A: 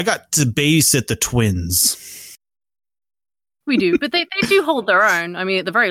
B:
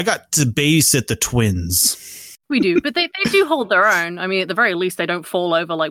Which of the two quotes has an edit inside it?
B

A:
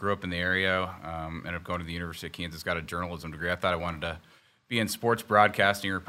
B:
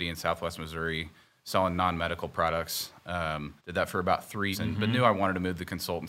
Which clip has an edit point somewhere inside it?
B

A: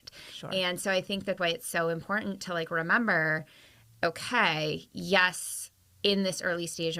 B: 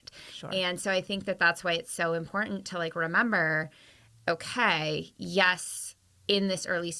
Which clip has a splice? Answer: A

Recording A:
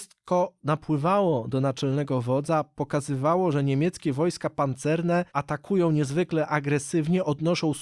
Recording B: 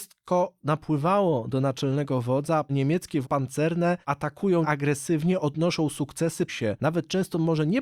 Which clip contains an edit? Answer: B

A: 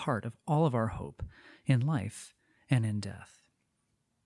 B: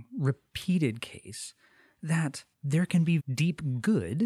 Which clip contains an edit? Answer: B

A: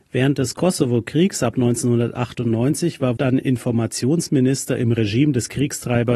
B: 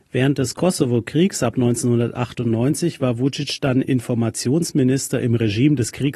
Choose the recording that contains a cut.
A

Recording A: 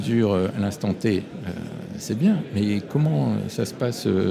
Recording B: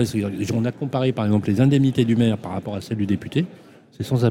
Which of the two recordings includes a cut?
A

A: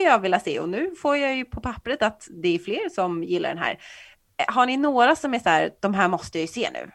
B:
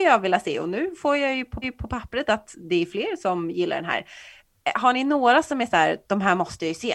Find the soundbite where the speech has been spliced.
B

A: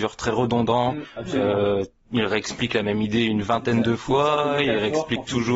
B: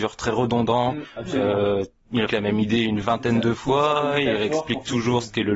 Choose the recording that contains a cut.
B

